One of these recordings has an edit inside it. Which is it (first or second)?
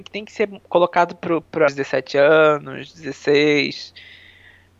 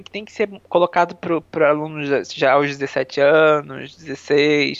first